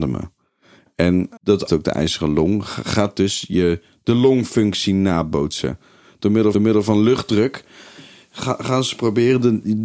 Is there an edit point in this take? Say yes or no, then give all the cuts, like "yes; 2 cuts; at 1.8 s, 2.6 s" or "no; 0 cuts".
yes; 3 cuts; at 1.4 s, 1.7 s, 6.5 s